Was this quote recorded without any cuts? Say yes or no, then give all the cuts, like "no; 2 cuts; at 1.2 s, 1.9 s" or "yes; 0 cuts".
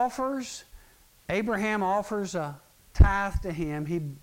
yes; 0 cuts